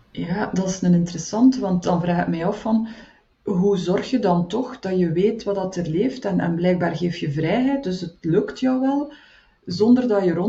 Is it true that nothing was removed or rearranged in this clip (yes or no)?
yes